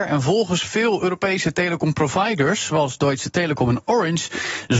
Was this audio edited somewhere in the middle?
no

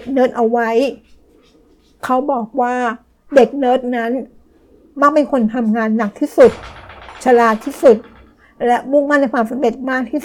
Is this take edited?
no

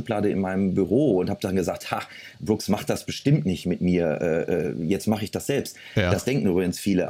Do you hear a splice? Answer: no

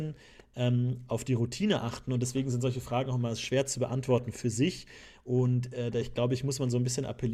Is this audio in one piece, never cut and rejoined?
yes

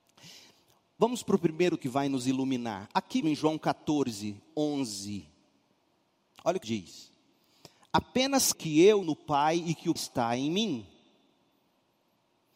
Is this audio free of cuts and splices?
no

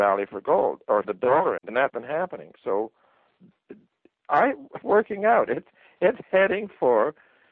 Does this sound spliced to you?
yes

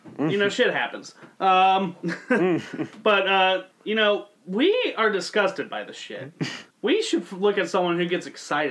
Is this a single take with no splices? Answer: no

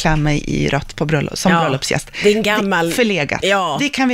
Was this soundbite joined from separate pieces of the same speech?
no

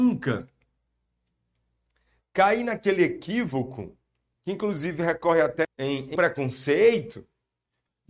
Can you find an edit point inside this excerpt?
yes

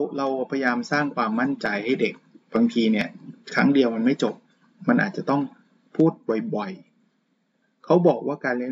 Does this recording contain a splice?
yes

